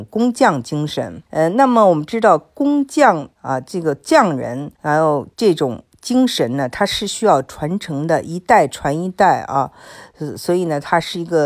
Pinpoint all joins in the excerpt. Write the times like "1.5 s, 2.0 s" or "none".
1.3 s, 3.3 s, 4.7 s, 5.3 s